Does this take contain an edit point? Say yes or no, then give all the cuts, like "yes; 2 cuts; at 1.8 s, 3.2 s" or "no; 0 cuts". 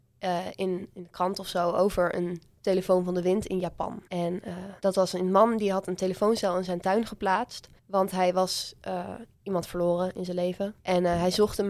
yes; 5 cuts; at 4.1 s, 4.8 s, 7.8 s, 9.3 s, 10.8 s